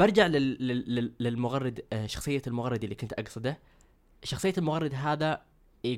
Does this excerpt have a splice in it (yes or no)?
no